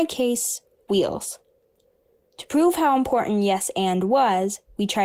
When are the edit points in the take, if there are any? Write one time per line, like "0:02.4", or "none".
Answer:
none